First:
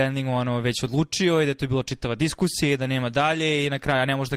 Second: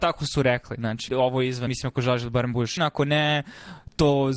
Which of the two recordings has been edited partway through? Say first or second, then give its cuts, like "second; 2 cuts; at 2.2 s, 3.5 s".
second; 3 cuts; at 1.1 s, 1.7 s, 2.8 s